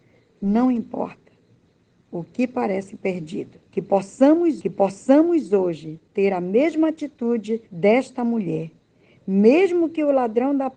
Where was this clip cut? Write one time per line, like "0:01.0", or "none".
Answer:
0:03.6
0:04.6
0:07.7